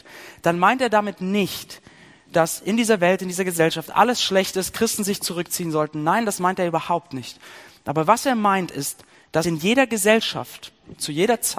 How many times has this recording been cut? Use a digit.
1